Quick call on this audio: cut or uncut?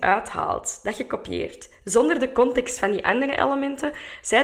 uncut